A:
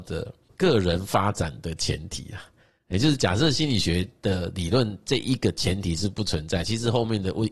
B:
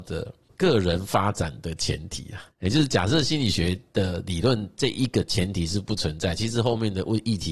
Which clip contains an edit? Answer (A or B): B